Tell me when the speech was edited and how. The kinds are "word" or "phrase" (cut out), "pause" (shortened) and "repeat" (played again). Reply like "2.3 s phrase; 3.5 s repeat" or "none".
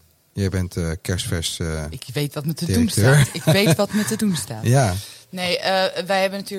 none